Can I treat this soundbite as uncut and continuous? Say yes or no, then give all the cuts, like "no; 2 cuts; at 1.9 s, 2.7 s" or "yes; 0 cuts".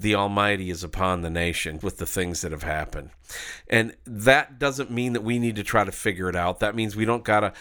no; 1 cut; at 1.8 s